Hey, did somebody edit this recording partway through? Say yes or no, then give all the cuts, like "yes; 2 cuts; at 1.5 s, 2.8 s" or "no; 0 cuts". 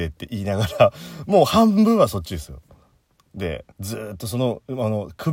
yes; 1 cut; at 3.7 s